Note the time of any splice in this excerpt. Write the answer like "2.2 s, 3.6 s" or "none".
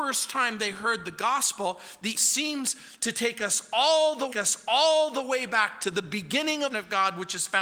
2.1 s, 4.3 s, 6.7 s